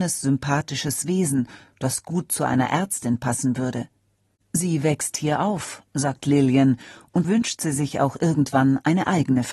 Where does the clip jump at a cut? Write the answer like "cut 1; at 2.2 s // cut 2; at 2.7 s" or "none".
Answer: cut 1; at 7.2 s